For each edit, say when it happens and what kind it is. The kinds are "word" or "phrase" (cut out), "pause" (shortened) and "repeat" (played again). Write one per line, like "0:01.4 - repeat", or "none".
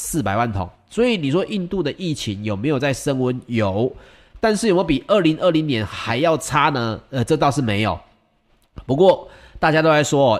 none